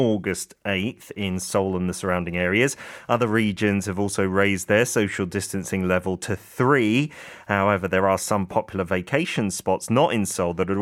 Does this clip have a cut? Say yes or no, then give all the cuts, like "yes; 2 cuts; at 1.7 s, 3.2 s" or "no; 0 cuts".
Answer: no; 0 cuts